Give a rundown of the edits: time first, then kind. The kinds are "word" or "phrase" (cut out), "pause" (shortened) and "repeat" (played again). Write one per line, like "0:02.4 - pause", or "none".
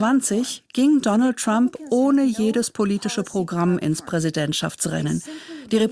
none